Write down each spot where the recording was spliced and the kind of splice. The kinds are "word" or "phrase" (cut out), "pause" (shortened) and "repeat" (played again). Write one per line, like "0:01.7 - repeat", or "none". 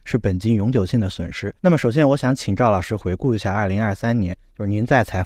0:01.6 - pause